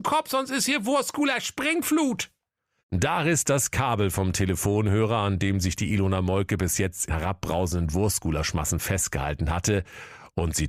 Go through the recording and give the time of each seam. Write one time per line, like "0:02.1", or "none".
0:07.1